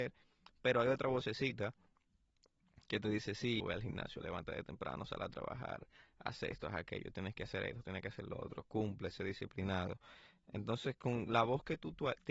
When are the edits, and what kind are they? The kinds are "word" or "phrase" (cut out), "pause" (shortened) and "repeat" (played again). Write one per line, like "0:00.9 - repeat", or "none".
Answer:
0:03.6 - word